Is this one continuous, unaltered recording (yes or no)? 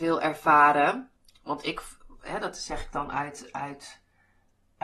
yes